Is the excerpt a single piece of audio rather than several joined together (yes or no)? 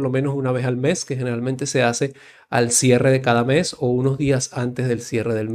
yes